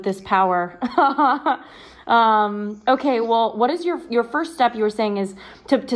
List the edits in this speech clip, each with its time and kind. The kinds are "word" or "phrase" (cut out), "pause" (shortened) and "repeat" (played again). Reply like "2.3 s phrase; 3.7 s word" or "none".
none